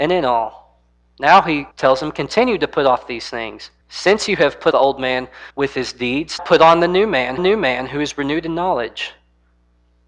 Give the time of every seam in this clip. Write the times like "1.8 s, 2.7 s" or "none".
1.7 s, 3.8 s, 4.7 s, 5.5 s, 6.4 s, 7.4 s

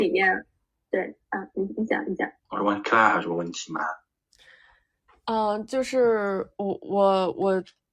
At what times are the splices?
2.4 s

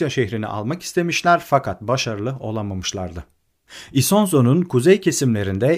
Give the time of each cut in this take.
none

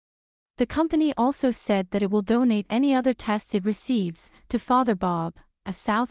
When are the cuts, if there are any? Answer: none

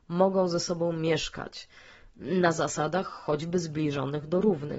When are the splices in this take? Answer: none

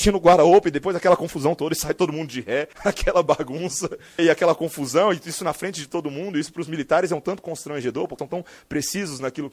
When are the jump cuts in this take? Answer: 2.7 s, 4.2 s, 8.2 s

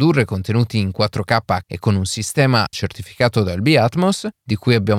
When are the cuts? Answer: 1.6 s, 2.7 s

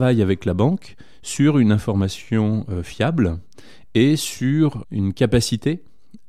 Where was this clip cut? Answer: none

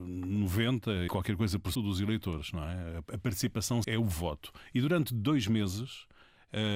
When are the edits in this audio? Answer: 1.1 s, 1.7 s, 3.8 s

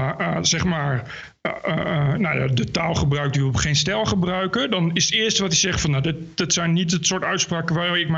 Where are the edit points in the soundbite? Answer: none

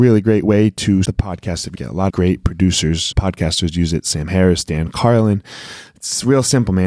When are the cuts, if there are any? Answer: 1.0 s, 1.7 s, 2.1 s, 3.1 s

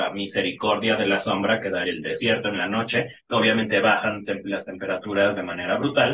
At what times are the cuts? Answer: 1.8 s, 3.2 s

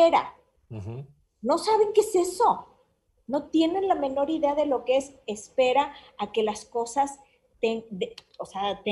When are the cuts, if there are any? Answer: none

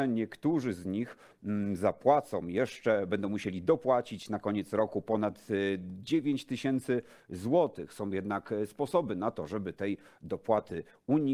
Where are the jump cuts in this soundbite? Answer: none

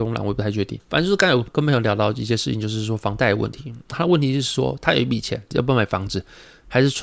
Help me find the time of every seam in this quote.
none

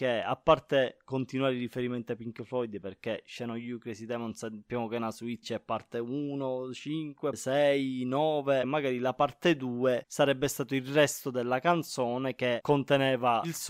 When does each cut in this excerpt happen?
5.4 s

